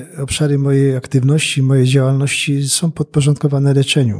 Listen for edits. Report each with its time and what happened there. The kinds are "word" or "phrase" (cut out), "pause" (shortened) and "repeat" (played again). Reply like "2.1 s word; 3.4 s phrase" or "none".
none